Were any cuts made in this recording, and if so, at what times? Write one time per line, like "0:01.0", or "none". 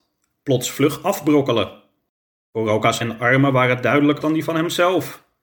0:03.0
0:04.2